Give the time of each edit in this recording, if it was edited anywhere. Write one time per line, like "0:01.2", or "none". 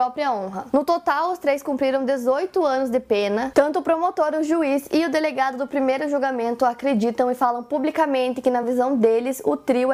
none